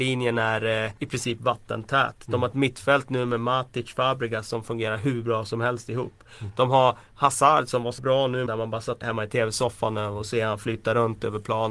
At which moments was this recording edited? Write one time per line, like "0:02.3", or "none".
0:01.0
0:08.0
0:08.5
0:09.0